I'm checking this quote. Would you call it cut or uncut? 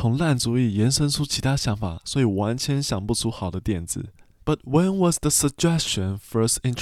uncut